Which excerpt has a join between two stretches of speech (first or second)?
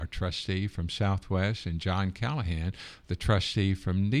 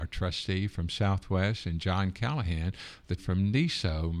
second